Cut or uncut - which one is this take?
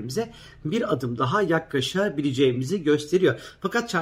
uncut